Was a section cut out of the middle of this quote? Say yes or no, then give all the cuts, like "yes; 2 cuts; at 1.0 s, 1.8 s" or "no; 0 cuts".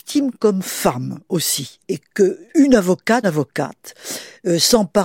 yes; 3 cuts; at 1.8 s, 2.5 s, 3.2 s